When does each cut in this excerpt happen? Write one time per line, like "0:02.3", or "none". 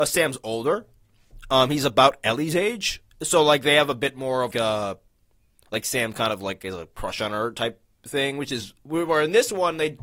0:03.1
0:04.5

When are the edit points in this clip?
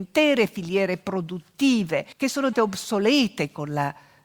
0:02.1
0:02.5

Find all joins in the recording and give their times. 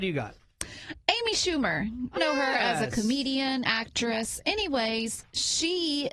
0:02.2
0:03.6

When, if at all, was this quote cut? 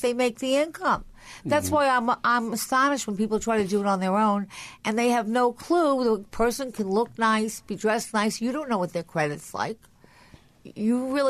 none

